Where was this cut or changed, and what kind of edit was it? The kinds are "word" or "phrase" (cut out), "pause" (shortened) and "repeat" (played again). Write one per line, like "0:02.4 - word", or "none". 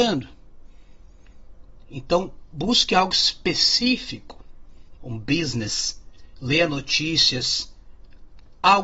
0:04.9 - phrase